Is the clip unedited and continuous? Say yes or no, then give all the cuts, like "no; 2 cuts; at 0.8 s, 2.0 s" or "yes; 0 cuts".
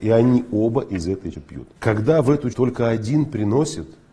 no; 3 cuts; at 1.3 s, 1.8 s, 2.5 s